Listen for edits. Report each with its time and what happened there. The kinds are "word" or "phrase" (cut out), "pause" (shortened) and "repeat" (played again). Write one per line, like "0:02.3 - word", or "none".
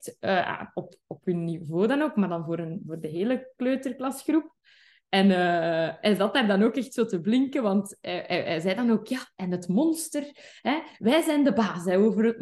none